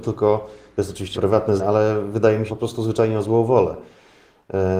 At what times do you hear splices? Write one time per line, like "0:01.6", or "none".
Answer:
0:01.1
0:01.6
0:02.5